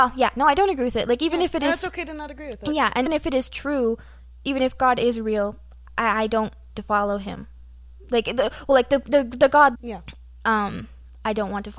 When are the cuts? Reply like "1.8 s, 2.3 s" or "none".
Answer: 3.1 s, 6.8 s, 9.7 s